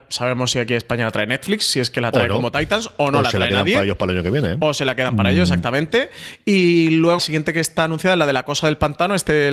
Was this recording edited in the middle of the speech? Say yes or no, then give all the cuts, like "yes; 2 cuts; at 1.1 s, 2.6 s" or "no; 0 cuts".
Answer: yes; 1 cut; at 7.2 s